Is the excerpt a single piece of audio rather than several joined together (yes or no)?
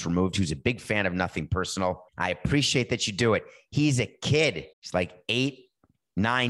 no